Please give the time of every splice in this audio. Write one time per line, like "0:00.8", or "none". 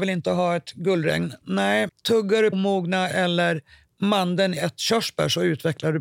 0:01.9
0:02.5
0:03.1
0:04.6